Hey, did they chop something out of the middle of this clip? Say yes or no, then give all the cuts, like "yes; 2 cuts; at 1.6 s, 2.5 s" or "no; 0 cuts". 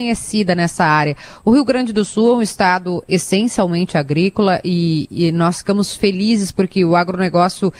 no; 0 cuts